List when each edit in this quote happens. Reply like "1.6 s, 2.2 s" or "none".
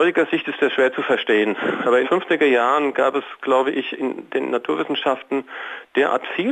2.0 s